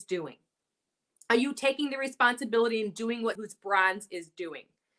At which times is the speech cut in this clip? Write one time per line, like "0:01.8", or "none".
0:03.3